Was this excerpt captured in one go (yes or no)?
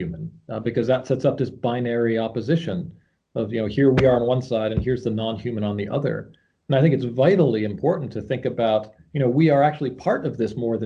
yes